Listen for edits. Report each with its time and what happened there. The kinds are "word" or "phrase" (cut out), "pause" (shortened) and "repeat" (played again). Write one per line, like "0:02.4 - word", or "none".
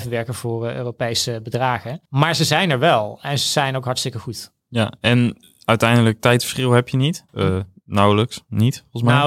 0:02.1 - pause
0:04.6 - pause
0:07.3 - pause